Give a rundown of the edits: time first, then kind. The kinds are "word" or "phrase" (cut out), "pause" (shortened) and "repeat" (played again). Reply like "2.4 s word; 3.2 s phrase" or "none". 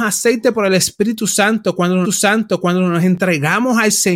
2.0 s repeat